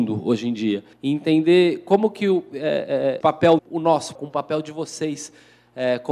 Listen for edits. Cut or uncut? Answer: cut